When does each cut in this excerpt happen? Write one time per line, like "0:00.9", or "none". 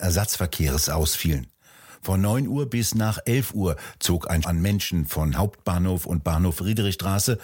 0:04.4